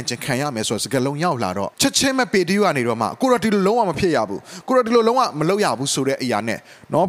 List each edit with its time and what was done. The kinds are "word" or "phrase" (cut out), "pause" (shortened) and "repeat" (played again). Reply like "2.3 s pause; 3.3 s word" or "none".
1.7 s pause